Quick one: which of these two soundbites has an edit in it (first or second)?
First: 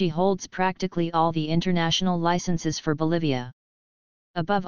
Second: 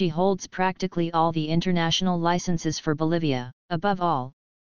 second